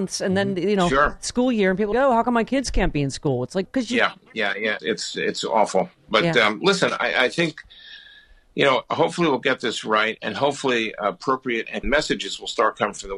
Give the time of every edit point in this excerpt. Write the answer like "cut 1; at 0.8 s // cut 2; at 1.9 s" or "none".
cut 1; at 1.9 s // cut 2; at 3.7 s // cut 3; at 4.8 s // cut 4; at 11.8 s